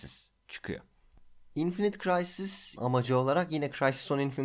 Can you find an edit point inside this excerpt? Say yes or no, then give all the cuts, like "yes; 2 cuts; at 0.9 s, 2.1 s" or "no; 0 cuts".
yes; 1 cut; at 2.8 s